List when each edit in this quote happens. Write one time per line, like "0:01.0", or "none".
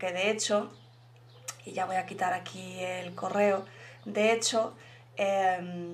none